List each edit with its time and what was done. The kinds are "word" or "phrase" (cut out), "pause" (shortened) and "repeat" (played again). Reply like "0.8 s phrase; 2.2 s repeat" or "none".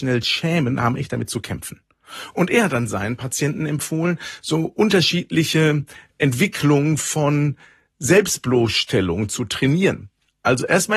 none